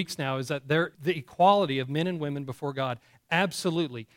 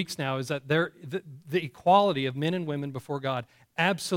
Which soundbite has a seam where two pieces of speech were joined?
first; 1 cut; at 0.9 s

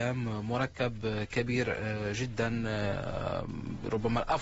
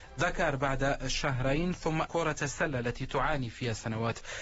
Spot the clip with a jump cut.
second; 1 cut; at 2.1 s

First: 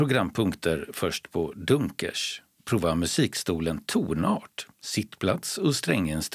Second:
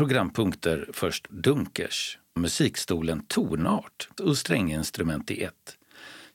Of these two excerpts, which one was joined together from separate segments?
second; 3 cuts; at 1.3 s, 2.4 s, 4.2 s

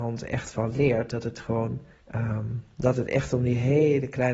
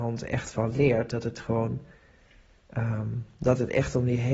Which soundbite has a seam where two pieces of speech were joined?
first; 1 cut; at 2.0 s

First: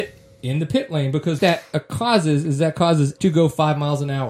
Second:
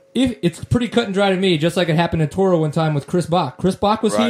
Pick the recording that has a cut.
first; 2 cuts; at 1.4 s, 3.2 s

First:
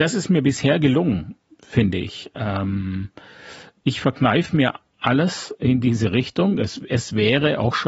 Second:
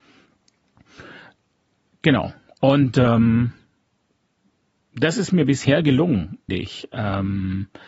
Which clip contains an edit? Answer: second; 1 cut; at 6.5 s

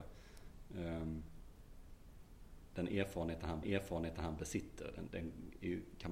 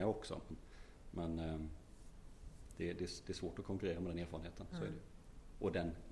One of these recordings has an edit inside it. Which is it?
first; 2 cuts; at 3.6 s, 5.1 s

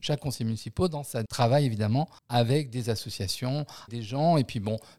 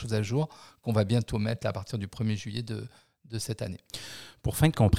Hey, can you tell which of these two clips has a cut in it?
first; 3 cuts; at 1.3 s, 2.2 s, 3.9 s

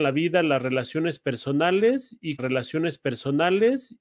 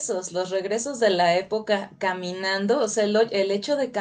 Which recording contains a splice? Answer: first; 1 cut; at 2.4 s

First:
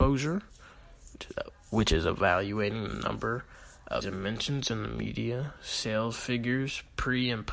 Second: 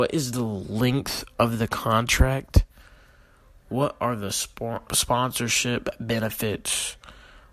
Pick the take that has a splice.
first; 1 cut; at 4.0 s

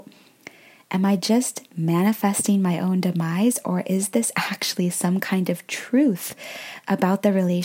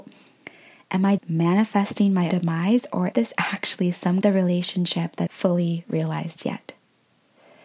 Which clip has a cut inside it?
second; 5 cuts; at 1.2 s, 2.3 s, 3.1 s, 4.2 s, 5.3 s

